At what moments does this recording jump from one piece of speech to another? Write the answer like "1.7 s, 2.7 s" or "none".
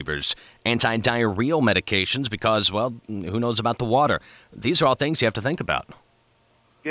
none